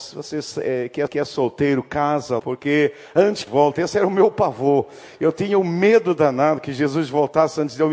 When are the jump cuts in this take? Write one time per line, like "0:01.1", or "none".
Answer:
0:01.1
0:02.4
0:03.5